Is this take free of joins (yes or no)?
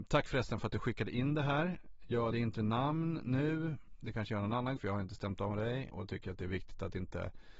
no